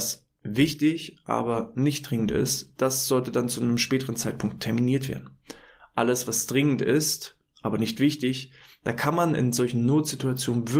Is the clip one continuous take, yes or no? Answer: yes